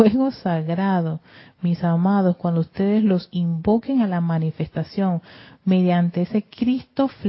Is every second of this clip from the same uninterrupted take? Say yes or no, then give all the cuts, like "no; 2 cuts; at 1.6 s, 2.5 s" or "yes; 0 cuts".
yes; 0 cuts